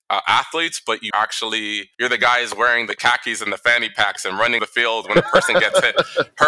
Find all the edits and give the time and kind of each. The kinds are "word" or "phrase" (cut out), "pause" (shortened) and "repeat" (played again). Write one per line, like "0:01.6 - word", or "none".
0:01.1 - word
0:01.9 - pause
0:04.6 - word